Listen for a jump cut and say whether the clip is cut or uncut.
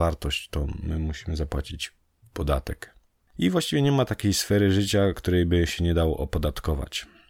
uncut